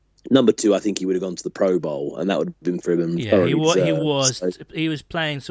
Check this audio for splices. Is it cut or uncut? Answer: cut